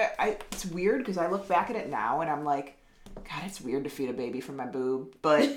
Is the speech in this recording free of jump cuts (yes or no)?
yes